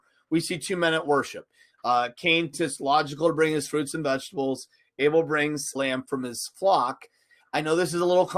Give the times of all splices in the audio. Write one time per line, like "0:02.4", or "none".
0:02.5
0:05.8